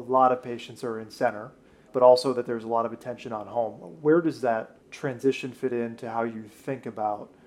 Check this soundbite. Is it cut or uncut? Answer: cut